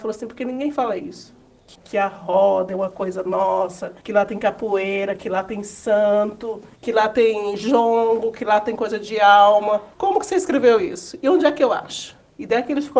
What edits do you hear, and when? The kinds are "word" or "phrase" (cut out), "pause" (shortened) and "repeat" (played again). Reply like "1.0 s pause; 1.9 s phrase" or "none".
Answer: 1.7 s word; 4.0 s pause; 6.7 s pause; 9.9 s pause